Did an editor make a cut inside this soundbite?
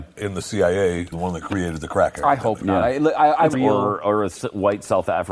yes; 2 cuts; at 1.1 s, 3.5 s

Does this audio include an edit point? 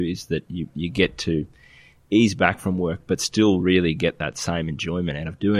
no; 0 cuts

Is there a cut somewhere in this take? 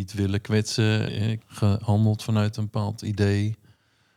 yes; 3 cuts; at 1.1 s, 1.4 s, 2.5 s

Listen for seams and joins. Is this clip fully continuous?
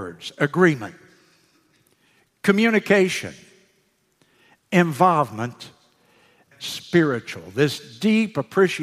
no; 1 cut; at 6.5 s

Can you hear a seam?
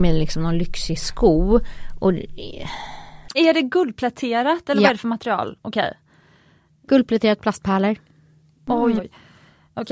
yes; 2 cuts; at 3.3 s, 9.0 s

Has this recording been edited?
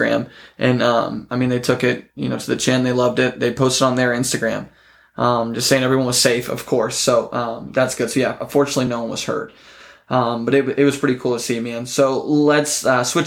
no; 0 cuts

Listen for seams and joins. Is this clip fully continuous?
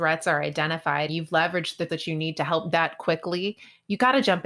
no; 3 cuts; at 1.1 s, 1.9 s, 2.7 s

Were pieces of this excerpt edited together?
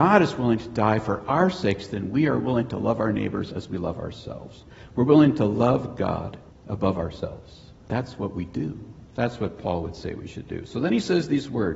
yes; 3 cuts; at 6.5 s, 7.8 s, 9.1 s

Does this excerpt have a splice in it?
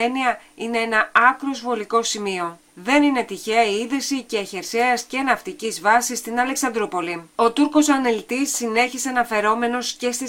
yes; 1 cut; at 2.7 s

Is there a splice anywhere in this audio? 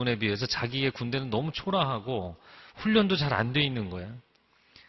no; 0 cuts

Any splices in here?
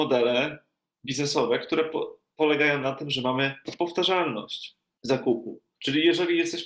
yes; 1 cut; at 5.8 s

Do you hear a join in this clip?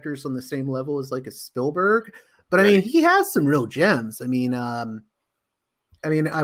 no; 0 cuts

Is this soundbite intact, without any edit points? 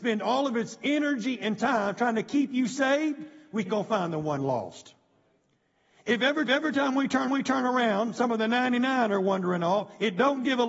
no; 3 cuts; at 3.7 s, 6.5 s, 7.3 s

